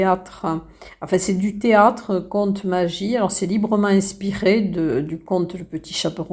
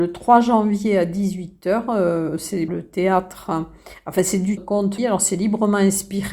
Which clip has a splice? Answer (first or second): second